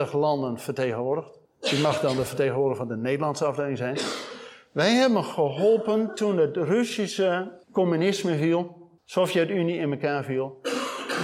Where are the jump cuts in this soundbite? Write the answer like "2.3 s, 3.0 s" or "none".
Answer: 1.5 s, 7.6 s, 9.0 s